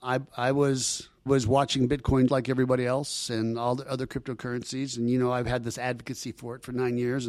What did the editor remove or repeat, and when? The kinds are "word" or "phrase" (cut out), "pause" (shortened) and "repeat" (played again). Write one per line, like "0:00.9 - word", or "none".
0:01.3 - word
0:02.3 - word